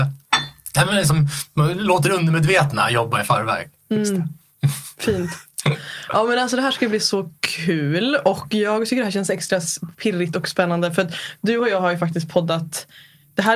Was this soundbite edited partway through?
no; 0 cuts

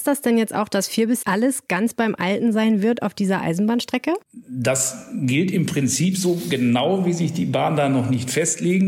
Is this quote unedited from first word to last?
no; 2 cuts; at 1.2 s, 4.2 s

